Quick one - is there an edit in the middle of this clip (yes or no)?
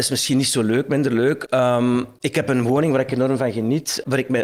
no